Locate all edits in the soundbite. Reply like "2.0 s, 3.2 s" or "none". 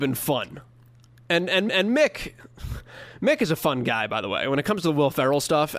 1.7 s